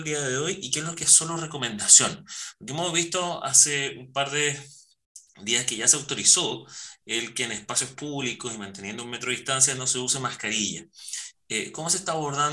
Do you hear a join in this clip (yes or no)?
no